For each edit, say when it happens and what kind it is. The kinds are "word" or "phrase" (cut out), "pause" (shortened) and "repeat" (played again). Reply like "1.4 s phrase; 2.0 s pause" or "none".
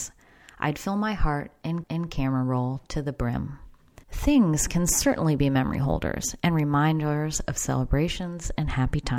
1.8 s repeat; 4.0 s pause